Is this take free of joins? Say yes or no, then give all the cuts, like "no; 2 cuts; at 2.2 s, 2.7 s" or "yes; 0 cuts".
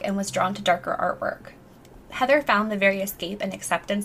no; 1 cut; at 2.0 s